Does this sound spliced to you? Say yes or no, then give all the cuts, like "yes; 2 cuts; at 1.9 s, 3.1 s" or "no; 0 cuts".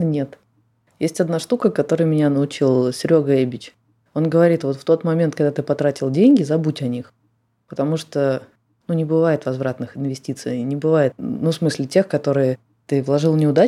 no; 0 cuts